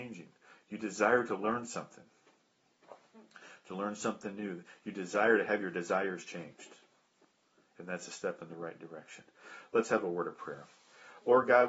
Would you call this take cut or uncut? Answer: uncut